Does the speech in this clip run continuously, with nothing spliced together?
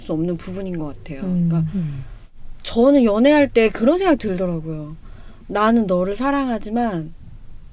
yes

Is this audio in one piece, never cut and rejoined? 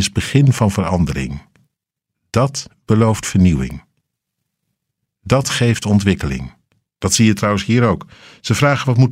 yes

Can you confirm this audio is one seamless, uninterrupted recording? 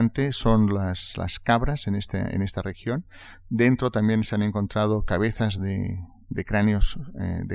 yes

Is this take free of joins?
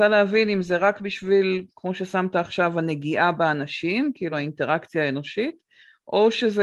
yes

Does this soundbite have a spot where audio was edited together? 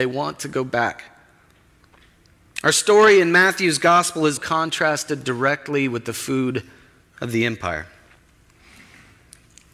yes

